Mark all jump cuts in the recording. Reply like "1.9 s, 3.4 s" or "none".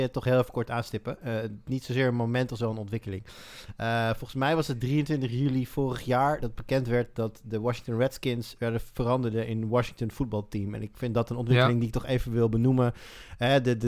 none

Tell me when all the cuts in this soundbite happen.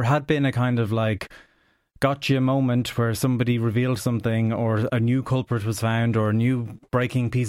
none

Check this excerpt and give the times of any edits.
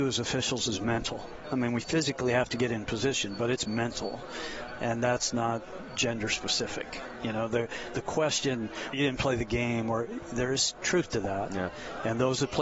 8.9 s

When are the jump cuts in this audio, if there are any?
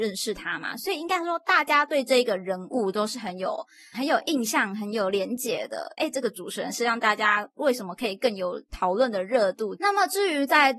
3.9 s, 6.0 s

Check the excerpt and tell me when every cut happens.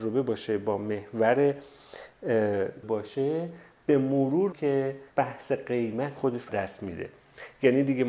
2.8 s, 4.5 s, 5.1 s, 6.2 s, 6.5 s

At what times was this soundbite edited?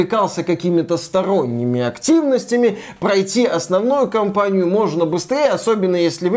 none

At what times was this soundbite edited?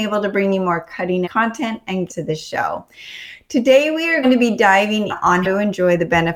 1.2 s, 2.1 s, 4.2 s, 5.1 s, 5.4 s

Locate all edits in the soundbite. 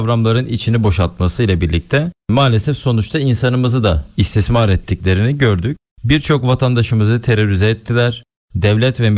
none

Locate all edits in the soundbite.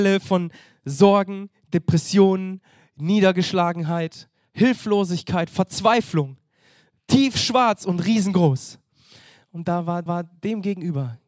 10.1 s

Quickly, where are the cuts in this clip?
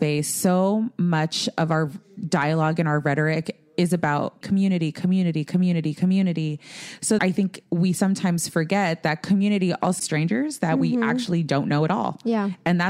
4.4 s, 7.2 s, 10.0 s

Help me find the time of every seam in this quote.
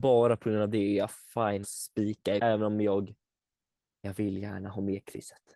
1.6 s, 2.4 s

